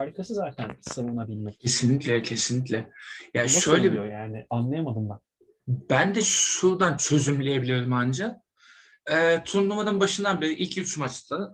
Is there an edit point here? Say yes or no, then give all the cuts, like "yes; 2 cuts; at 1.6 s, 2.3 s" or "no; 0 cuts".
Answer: no; 0 cuts